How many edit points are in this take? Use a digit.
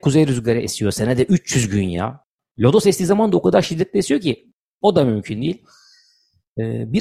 0